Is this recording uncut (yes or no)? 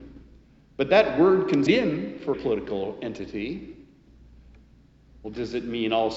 no